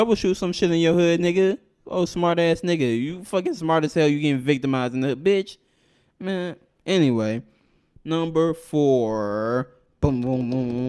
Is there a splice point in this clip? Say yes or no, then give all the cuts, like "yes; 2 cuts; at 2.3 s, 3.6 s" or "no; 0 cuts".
no; 0 cuts